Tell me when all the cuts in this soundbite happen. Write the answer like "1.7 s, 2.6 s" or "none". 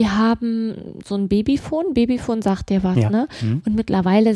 none